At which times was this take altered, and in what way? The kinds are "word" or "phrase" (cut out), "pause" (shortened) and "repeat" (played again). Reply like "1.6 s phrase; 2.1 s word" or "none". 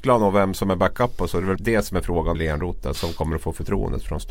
1.6 s word; 2.3 s phrase; 2.9 s word